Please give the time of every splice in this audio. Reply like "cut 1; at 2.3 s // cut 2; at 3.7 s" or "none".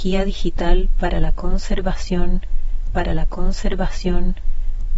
cut 1; at 2.9 s